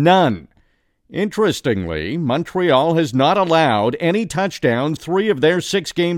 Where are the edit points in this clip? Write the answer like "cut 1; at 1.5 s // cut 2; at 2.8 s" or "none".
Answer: cut 1; at 5.0 s

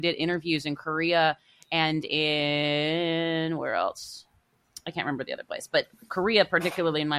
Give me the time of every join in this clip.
none

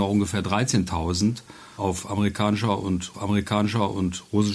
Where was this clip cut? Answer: cut 1; at 3.1 s

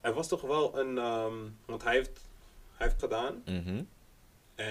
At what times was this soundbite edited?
cut 1; at 2.7 s // cut 2; at 3.0 s

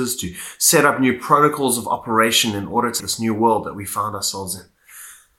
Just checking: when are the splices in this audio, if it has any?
cut 1; at 3.0 s

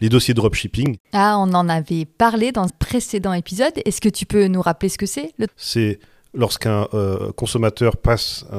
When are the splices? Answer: cut 1; at 2.7 s // cut 2; at 5.5 s

